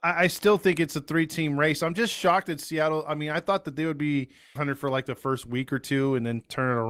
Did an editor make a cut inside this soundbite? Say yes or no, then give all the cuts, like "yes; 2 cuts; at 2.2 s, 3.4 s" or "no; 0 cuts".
yes; 1 cut; at 4.6 s